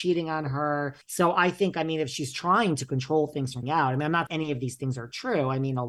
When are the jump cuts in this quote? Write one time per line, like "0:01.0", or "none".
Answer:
0:01.0
0:03.6
0:04.3